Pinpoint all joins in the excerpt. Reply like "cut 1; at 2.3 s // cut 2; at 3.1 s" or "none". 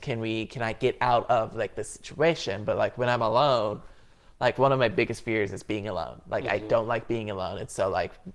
none